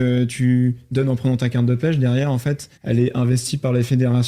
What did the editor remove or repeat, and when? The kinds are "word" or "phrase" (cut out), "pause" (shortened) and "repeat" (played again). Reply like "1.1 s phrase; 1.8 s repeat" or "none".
2.8 s pause